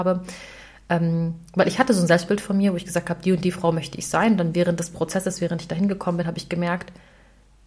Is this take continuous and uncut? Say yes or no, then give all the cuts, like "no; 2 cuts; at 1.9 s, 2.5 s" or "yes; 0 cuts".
yes; 0 cuts